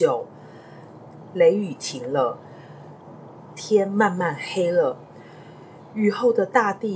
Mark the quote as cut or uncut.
uncut